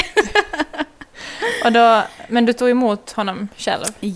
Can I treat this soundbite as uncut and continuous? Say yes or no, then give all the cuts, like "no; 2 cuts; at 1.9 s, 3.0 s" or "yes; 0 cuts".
yes; 0 cuts